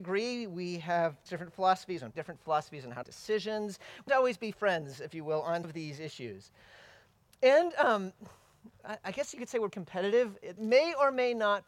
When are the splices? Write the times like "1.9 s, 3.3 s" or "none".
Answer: 1.3 s, 2.1 s, 3.0 s, 4.1 s, 4.5 s, 5.6 s, 9.7 s, 10.6 s

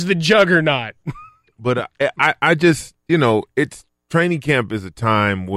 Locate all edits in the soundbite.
none

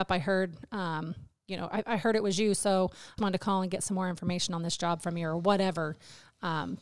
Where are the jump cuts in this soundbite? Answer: 3.2 s

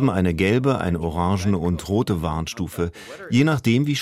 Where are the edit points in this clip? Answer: none

